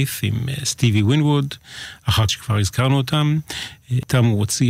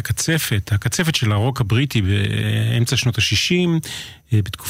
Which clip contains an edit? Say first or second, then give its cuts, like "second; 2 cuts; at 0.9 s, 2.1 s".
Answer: first; 1 cut; at 2.3 s